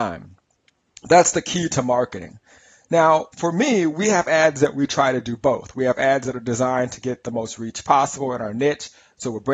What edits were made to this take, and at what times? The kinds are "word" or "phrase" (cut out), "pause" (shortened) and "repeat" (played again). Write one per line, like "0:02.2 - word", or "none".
0:03.3 - pause